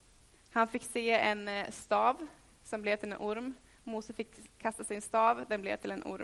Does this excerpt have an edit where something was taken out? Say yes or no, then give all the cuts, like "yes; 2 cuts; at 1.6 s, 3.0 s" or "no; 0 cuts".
no; 0 cuts